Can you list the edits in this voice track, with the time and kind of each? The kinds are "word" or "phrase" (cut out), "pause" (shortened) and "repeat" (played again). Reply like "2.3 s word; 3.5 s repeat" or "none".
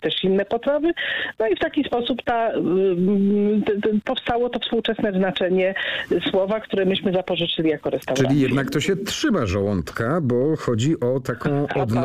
none